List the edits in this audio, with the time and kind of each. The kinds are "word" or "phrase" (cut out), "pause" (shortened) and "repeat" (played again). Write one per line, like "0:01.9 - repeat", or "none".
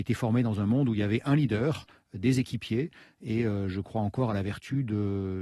none